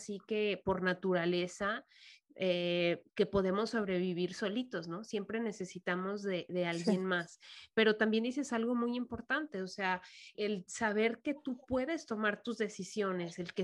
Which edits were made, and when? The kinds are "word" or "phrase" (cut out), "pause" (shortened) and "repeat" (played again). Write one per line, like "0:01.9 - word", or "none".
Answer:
0:03.1 - pause
0:10.3 - word